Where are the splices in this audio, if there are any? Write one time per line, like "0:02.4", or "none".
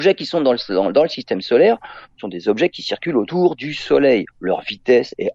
0:04.3